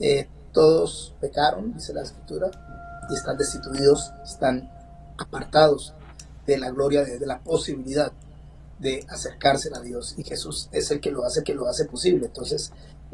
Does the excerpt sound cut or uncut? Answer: cut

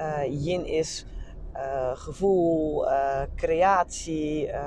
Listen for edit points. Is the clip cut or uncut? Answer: uncut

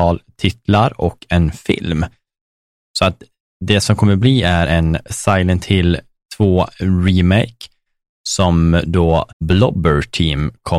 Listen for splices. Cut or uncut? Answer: cut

